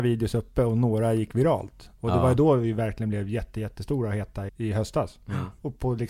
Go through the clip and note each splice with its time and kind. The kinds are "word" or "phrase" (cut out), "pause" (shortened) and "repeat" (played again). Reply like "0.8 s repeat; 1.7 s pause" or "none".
4.5 s word